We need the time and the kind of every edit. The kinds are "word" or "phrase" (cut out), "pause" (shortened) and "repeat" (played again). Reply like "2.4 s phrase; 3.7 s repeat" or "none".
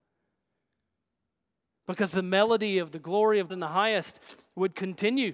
3.5 s word

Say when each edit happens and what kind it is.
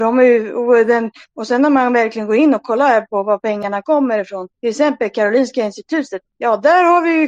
4.5 s pause; 6.3 s pause

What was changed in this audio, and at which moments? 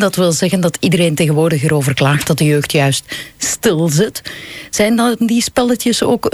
none

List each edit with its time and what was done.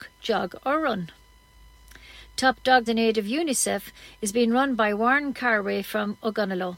2.9 s word

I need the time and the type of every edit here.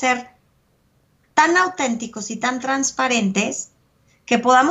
none

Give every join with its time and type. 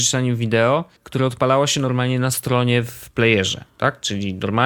1.0 s pause

